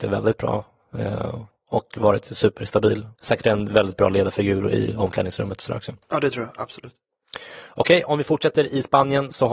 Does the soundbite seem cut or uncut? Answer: cut